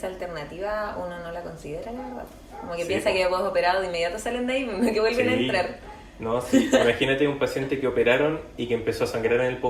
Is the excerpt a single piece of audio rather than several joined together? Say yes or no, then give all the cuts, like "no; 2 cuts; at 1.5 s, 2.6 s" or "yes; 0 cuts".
yes; 0 cuts